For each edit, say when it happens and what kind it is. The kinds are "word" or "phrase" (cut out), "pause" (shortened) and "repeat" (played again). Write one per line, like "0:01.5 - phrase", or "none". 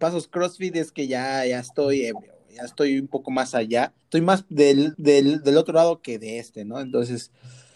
0:04.0 - pause
0:04.9 - repeat